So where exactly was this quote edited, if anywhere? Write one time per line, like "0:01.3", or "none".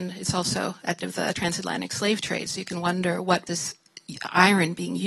0:01.0
0:03.5